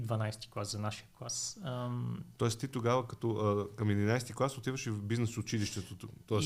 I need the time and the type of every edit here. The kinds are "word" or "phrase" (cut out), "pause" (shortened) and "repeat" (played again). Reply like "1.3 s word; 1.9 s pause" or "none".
none